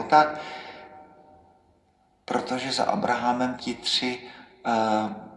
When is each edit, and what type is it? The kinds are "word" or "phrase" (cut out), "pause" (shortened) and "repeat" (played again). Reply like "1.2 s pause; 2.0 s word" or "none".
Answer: 3.6 s word